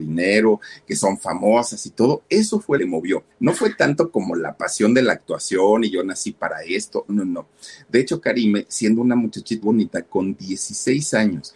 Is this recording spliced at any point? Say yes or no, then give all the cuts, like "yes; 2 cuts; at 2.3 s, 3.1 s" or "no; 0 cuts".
yes; 4 cuts; at 2.8 s, 3.3 s, 7.1 s, 9.6 s